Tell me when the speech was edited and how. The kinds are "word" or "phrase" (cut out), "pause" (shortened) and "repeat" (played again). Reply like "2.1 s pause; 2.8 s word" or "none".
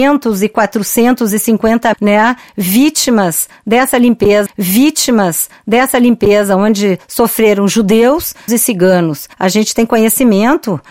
1.9 s word; 4.5 s repeat; 8.5 s word; 9.3 s pause